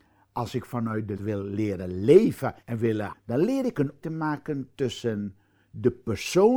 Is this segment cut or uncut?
cut